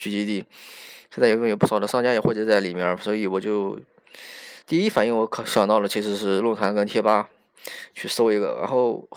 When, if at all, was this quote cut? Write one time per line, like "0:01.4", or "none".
0:04.6